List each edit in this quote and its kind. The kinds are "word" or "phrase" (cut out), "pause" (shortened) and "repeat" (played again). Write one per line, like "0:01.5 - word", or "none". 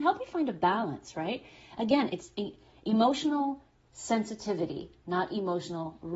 none

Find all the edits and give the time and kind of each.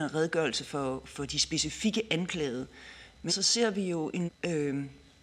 0:03.3 - word
0:04.3 - word

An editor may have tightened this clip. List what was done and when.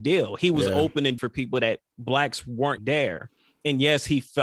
0:01.2 - word
0:01.9 - pause
0:02.8 - word

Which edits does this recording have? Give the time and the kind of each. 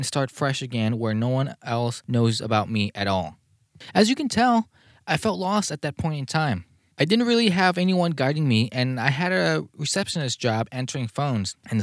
none

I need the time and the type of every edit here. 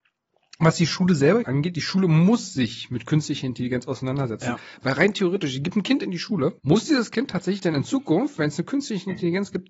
0:01.4 - word
0:06.6 - pause

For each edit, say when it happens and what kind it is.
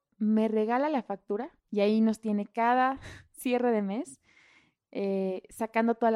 0:01.6 - pause

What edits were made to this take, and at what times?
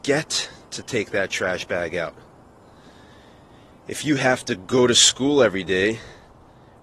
none

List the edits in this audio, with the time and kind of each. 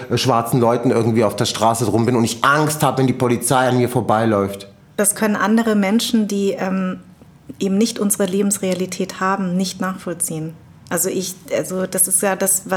none

